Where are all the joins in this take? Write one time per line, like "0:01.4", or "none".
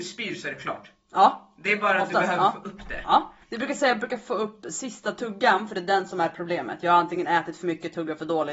0:03.4